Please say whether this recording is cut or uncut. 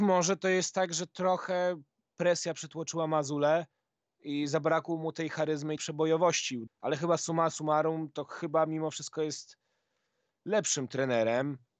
cut